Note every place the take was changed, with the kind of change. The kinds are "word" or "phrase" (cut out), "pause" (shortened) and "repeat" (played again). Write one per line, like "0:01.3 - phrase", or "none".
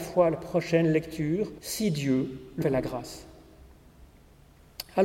0:01.6 - pause
0:02.6 - phrase